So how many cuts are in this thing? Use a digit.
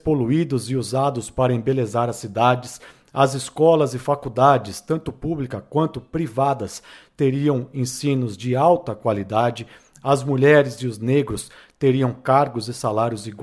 0